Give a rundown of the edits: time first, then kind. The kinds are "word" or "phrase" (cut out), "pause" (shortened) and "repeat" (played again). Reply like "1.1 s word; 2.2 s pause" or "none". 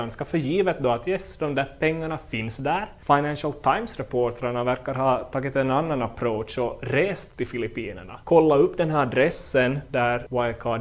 none